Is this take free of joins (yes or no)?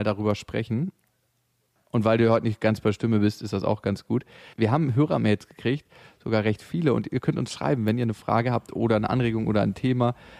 yes